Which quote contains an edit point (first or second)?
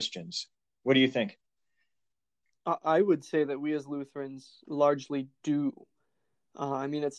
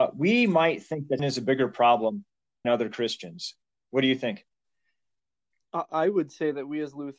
second